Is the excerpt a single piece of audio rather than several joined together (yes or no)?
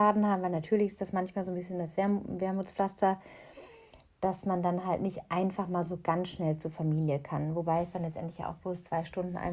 yes